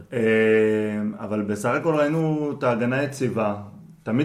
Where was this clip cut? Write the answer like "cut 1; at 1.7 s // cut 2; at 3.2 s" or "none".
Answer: none